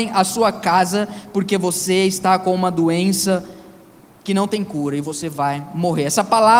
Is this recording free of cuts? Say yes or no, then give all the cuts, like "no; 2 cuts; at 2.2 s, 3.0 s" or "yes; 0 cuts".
yes; 0 cuts